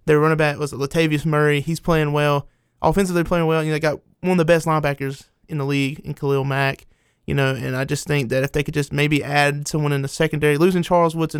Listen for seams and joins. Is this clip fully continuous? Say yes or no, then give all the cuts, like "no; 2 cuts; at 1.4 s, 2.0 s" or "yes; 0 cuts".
yes; 0 cuts